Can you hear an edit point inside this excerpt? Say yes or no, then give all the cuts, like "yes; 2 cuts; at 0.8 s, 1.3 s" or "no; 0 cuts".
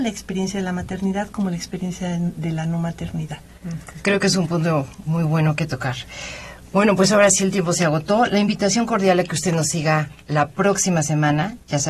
yes; 1 cut; at 5.1 s